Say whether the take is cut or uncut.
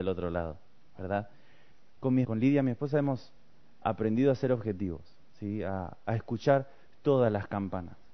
cut